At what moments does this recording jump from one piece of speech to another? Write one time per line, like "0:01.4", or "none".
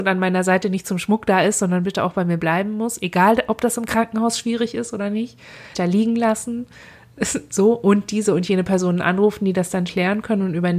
0:05.7
0:09.9